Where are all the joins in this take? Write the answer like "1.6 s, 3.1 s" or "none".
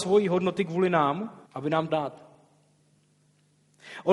1.5 s, 1.9 s